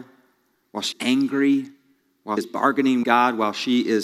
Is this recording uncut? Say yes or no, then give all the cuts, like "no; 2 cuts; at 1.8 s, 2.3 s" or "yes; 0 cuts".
no; 3 cuts; at 0.9 s, 2.4 s, 3.0 s